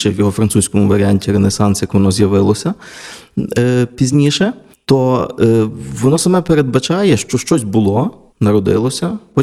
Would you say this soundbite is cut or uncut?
cut